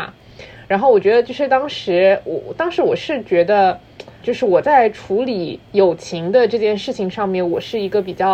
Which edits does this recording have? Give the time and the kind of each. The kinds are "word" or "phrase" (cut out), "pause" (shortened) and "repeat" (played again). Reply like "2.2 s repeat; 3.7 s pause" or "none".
4.2 s word

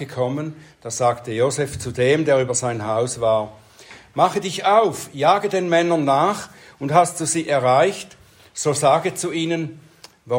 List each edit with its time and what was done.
none

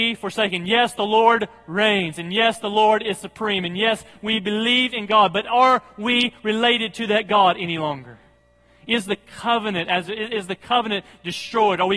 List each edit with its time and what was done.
none

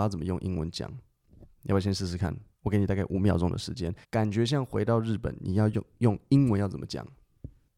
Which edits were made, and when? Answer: 1.5 s pause; 2.5 s pause; 4.0 s pause

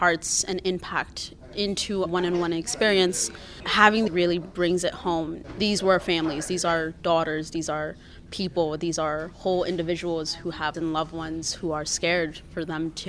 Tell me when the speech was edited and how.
2.1 s word; 4.1 s phrase; 10.7 s word

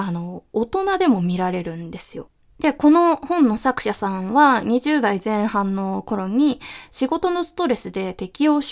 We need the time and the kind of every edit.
none

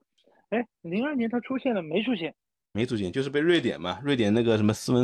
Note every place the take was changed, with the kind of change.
none

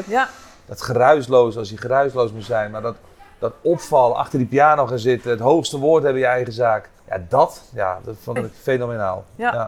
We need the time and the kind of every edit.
7.0 s pause; 8.4 s word

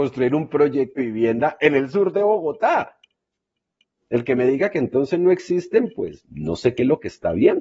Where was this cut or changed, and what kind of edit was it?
1.0 s word

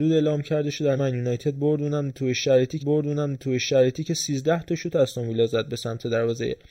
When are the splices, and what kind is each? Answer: 1.0 s phrase; 2.8 s repeat

